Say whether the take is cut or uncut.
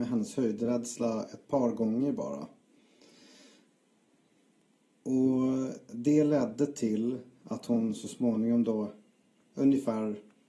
uncut